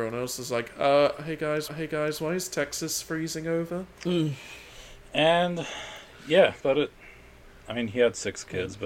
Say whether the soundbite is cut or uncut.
cut